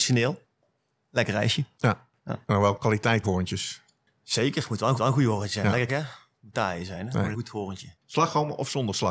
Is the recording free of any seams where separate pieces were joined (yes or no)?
no